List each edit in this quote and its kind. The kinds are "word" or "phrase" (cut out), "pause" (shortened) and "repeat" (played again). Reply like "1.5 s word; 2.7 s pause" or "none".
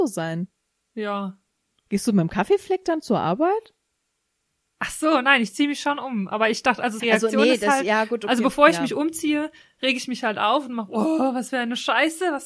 7.0 s phrase